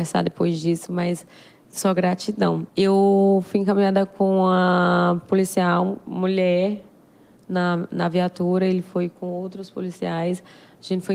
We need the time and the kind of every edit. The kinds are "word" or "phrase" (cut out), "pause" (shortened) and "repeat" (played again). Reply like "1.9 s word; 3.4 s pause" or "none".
none